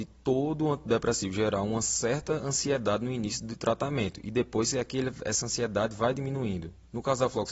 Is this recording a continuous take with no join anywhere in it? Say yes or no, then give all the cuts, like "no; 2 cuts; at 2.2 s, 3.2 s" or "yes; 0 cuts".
yes; 0 cuts